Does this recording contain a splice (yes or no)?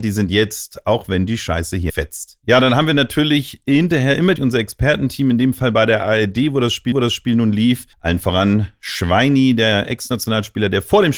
yes